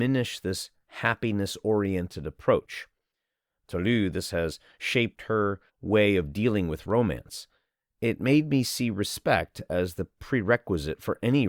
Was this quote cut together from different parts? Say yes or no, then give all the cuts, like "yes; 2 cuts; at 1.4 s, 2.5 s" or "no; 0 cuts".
yes; 1 cut; at 5.7 s